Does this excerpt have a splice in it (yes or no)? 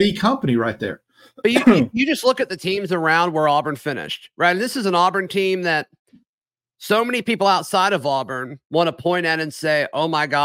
no